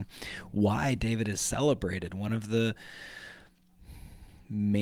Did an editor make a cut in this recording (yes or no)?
no